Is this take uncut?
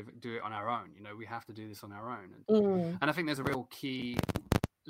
yes; 0 cuts

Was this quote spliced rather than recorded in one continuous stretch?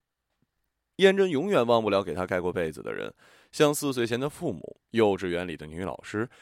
yes; 1 cut; at 4.8 s

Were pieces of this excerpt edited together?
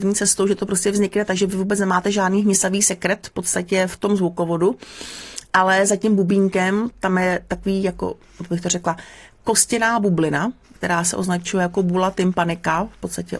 no; 0 cuts

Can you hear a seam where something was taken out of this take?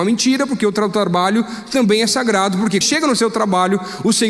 yes; 1 cut; at 2.8 s

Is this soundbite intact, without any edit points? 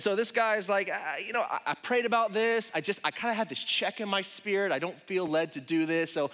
yes; 0 cuts

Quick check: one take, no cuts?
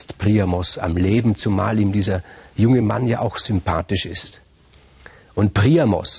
yes; 0 cuts

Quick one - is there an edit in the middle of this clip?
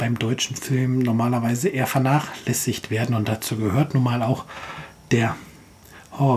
no; 0 cuts

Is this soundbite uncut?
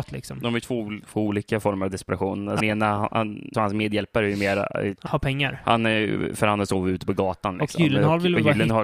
no; 4 cuts; at 1.0 s, 2.6 s, 3.5 s, 5.1 s

